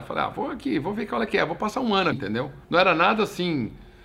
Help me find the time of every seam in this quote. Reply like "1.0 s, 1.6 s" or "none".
2.1 s, 2.6 s